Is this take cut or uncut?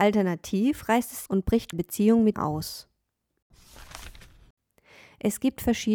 cut